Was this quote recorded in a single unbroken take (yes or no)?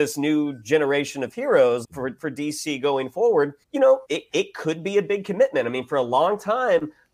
no